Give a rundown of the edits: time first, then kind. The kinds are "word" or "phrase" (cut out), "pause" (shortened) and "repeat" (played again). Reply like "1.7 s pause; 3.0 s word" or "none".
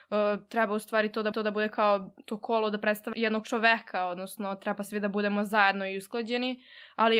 1.3 s repeat; 3.1 s word